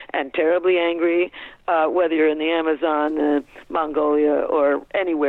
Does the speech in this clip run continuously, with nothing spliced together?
yes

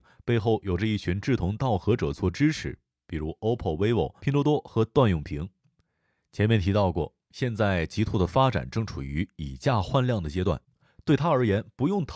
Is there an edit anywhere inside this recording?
no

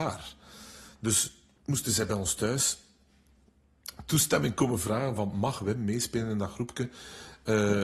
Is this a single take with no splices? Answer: no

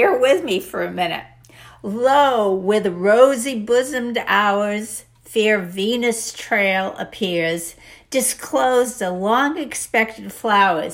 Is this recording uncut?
yes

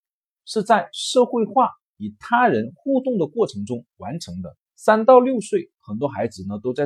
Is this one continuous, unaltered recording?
no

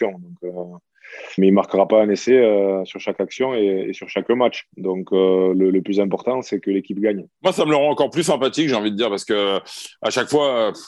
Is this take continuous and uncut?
no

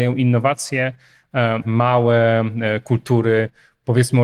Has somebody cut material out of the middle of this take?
yes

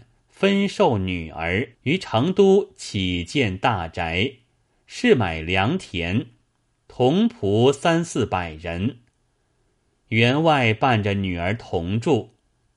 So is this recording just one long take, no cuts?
no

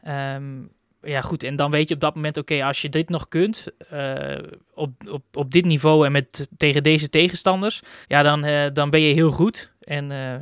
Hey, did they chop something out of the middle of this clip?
yes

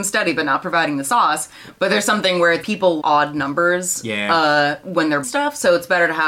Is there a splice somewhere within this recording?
yes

